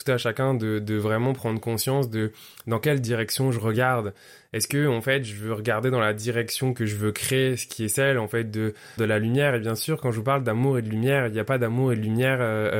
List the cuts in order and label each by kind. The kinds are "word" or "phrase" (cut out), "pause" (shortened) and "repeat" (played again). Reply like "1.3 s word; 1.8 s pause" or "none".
9.0 s word